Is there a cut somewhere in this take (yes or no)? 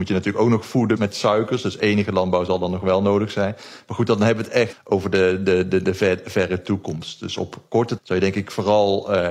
yes